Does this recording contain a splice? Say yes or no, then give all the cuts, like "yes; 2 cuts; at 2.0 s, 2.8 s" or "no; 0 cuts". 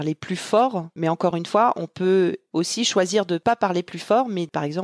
no; 0 cuts